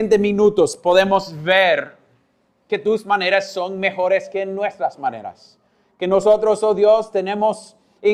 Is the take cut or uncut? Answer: uncut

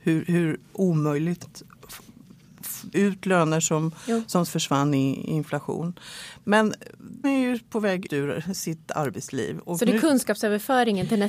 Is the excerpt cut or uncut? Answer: cut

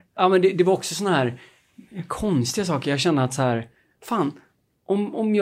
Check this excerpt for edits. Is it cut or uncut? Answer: uncut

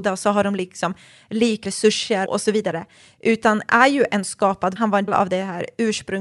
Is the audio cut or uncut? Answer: cut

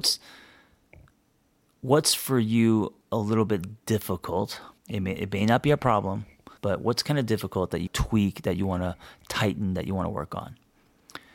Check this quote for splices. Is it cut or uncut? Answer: cut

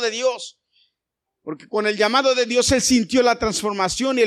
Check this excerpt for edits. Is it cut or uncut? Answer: uncut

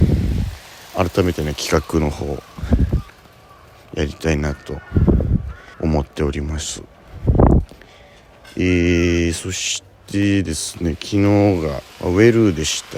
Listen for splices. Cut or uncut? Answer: cut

